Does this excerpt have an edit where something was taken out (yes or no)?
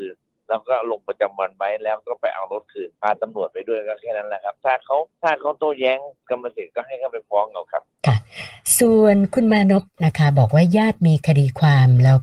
yes